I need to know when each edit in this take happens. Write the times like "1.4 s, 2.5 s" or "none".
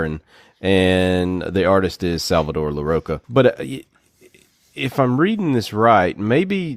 3.2 s